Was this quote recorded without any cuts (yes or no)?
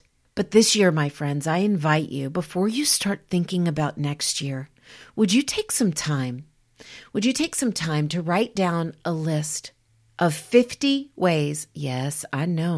yes